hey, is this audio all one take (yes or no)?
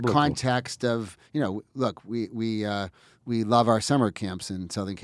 yes